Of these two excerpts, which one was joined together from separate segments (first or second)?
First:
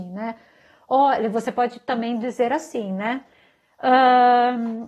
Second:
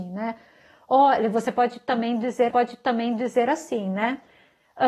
second